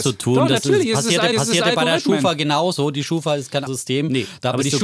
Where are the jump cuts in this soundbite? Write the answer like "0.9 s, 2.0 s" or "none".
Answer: 1.3 s, 3.7 s